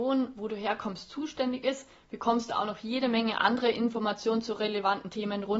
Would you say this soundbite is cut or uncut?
uncut